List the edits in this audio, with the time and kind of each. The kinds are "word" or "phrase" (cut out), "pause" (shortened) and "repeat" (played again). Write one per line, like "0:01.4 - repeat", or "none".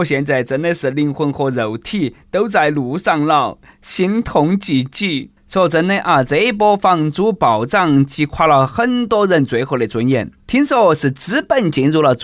0:05.4 - pause
0:10.4 - pause